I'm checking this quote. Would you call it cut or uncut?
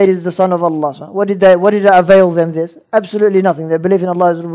uncut